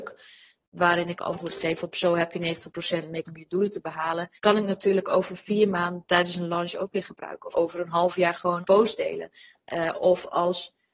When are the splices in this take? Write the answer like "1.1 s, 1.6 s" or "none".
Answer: 3.2 s, 4.4 s, 7.5 s, 8.6 s